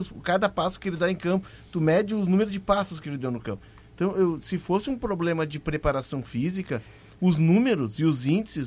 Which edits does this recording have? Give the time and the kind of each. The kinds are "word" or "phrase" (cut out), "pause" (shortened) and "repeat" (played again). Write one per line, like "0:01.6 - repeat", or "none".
none